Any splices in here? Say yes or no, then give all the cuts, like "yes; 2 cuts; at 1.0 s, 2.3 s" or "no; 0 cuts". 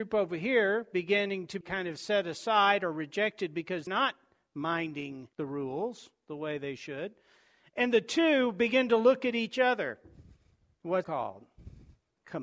yes; 3 cuts; at 1.6 s, 3.9 s, 11.0 s